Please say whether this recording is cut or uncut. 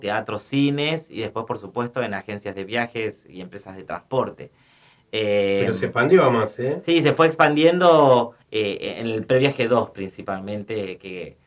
cut